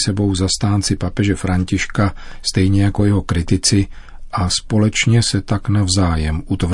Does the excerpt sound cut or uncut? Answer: uncut